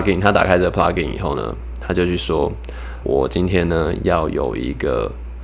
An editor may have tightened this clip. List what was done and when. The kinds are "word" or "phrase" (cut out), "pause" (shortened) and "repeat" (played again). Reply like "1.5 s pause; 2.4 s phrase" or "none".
3.0 s word